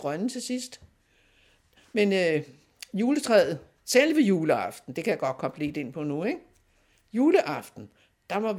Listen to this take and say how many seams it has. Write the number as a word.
zero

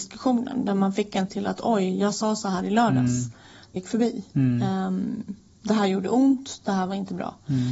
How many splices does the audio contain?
two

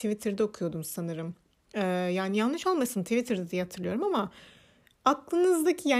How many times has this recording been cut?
zero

